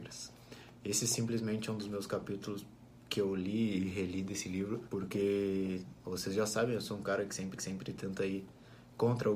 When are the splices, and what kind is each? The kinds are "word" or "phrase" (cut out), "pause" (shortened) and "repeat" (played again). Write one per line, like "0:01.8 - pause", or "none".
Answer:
0:07.6 - repeat